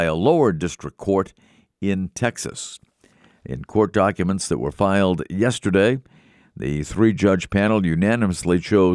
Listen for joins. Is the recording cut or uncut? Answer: uncut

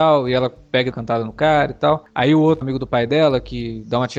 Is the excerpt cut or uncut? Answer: cut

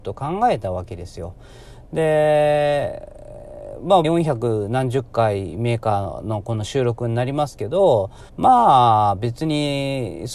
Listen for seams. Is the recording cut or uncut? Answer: cut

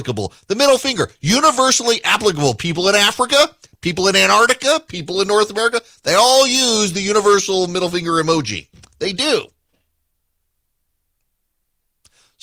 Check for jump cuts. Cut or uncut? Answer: uncut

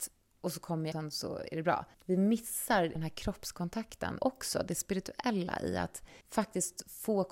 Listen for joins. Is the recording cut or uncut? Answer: cut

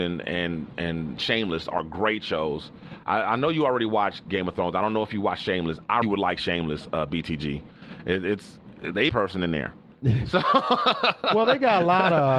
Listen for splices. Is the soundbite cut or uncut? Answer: cut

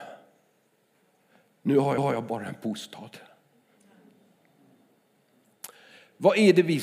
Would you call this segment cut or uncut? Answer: cut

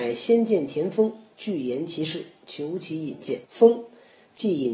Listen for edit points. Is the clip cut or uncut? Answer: cut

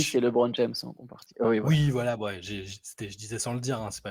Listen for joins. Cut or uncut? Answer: uncut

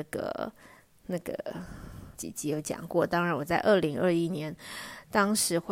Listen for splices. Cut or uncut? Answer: cut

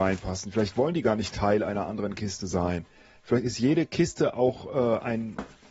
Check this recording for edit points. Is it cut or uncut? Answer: uncut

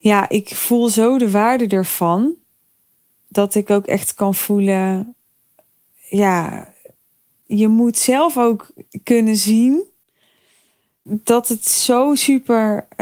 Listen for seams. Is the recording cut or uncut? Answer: uncut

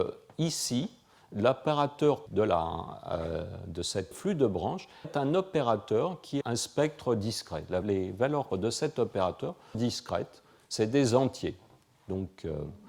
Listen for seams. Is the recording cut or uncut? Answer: cut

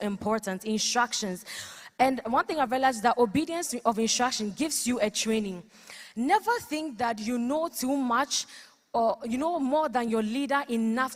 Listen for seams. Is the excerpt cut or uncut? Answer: uncut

